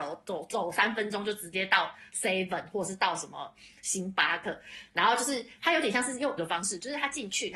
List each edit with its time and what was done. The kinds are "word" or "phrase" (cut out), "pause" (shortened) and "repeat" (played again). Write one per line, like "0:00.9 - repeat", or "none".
0:06.4 - word